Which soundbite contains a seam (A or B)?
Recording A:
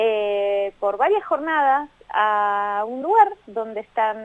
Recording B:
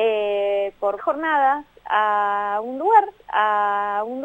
B